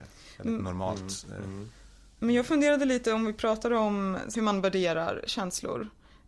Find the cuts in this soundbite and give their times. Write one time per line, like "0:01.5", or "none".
none